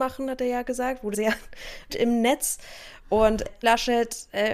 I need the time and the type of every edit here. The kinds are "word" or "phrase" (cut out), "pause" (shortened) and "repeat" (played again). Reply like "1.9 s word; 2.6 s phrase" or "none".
1.1 s word; 1.9 s word; 3.6 s word